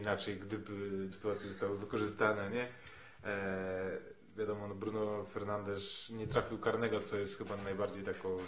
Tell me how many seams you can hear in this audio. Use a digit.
2